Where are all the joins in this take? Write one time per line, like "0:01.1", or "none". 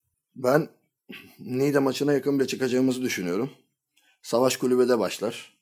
0:02.4